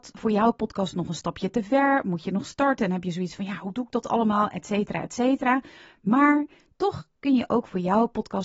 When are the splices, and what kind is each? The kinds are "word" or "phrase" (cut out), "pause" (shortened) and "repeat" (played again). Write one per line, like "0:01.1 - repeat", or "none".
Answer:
none